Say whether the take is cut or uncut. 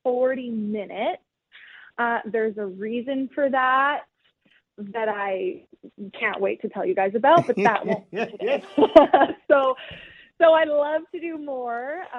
uncut